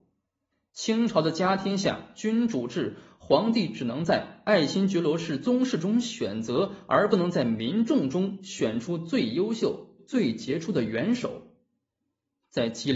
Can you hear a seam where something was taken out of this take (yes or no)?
no